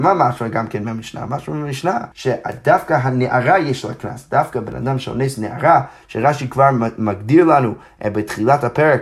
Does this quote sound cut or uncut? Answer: cut